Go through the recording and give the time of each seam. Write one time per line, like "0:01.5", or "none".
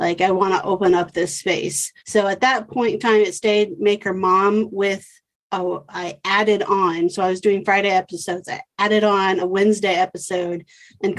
0:02.0
0:09.4